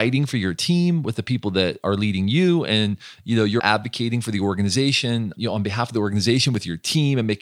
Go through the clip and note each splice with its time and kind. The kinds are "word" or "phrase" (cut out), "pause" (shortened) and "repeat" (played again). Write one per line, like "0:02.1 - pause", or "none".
0:03.6 - word
0:05.4 - word